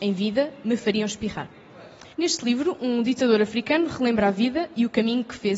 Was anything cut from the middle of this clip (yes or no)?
yes